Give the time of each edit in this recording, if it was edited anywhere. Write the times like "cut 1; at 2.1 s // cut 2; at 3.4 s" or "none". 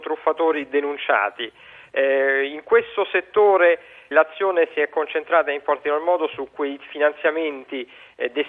cut 1; at 4.1 s

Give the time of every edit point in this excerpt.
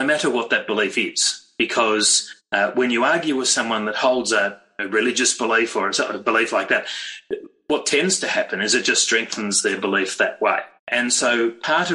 cut 1; at 2.4 s // cut 2; at 10.8 s

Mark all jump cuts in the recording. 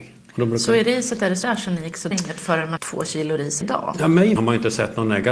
cut 1; at 1.4 s // cut 2; at 2.1 s // cut 3; at 2.8 s // cut 4; at 3.6 s // cut 5; at 4.4 s

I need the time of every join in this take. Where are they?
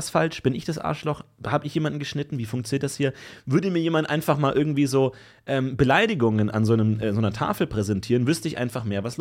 none

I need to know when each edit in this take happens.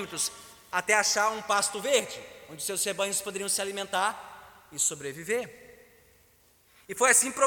none

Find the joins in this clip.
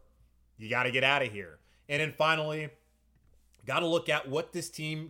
none

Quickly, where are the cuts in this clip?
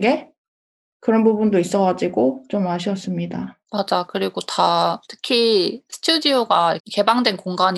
cut 1; at 3.6 s // cut 2; at 5.0 s // cut 3; at 6.8 s

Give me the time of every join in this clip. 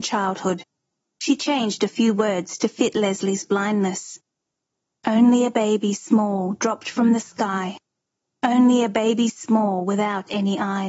none

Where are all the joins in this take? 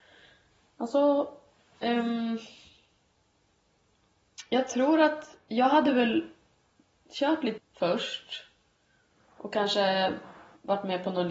cut 1; at 7.6 s

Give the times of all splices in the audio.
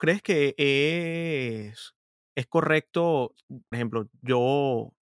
cut 1; at 2.2 s // cut 2; at 3.7 s

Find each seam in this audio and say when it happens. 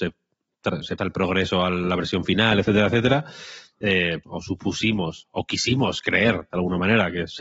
cut 1; at 1.0 s // cut 2; at 4.2 s

